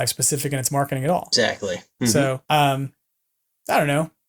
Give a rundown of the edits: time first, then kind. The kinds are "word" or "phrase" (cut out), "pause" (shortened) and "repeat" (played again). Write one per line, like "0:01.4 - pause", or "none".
0:02.4 - pause